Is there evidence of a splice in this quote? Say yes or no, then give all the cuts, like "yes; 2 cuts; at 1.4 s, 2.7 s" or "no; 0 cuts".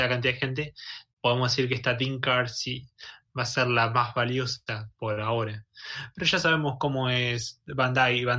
yes; 1 cut; at 1.1 s